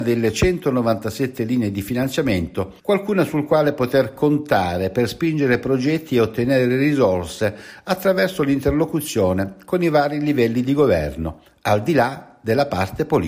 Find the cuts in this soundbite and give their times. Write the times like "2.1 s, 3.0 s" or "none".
2.8 s